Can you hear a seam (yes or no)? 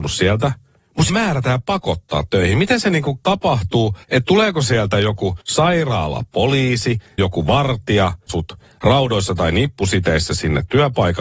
yes